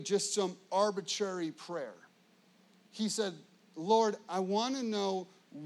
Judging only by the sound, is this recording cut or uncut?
uncut